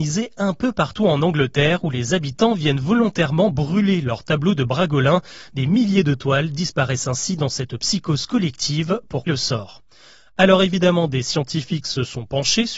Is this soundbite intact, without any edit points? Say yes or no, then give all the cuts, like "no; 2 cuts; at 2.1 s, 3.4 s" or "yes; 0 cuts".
no; 1 cut; at 9.3 s